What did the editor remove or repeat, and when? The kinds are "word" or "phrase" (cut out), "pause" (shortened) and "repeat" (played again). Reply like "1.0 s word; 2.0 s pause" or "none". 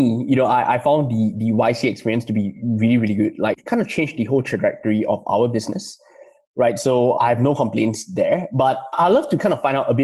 none